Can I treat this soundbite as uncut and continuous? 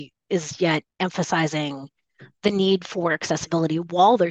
no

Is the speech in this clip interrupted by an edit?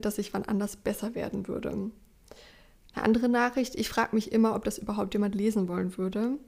no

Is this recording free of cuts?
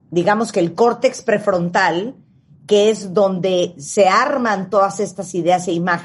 yes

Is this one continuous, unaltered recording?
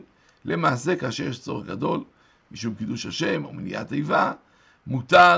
yes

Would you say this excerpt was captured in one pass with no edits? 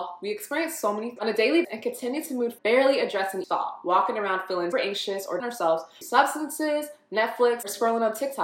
no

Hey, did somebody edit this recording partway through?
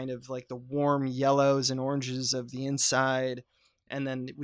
no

